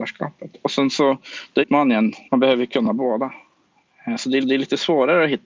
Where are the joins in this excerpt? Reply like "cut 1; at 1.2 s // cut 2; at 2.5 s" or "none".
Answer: cut 1; at 1.6 s // cut 2; at 2.3 s // cut 3; at 4.4 s